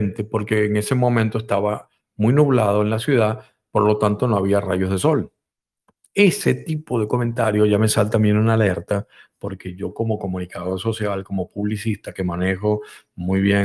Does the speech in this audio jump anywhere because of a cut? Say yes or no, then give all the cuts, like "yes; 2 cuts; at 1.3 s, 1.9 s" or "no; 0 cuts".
no; 0 cuts